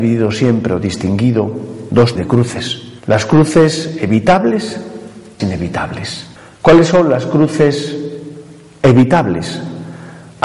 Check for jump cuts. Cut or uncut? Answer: cut